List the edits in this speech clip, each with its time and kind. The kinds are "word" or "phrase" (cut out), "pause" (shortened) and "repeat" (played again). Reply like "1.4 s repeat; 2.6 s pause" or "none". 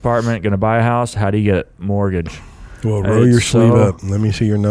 none